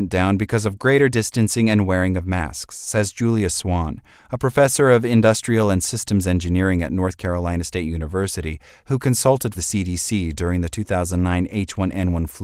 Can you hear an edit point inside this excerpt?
yes; 1 cut; at 9.5 s

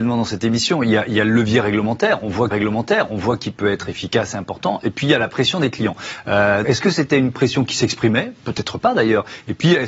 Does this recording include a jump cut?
yes; 2 cuts; at 2.5 s, 6.6 s

